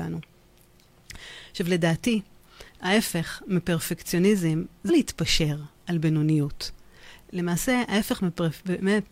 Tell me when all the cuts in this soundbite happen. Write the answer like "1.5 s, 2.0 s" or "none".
2.7 s, 4.9 s